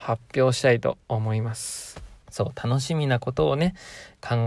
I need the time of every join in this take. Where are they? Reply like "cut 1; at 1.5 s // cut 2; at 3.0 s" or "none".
cut 1; at 1.0 s // cut 2; at 2.2 s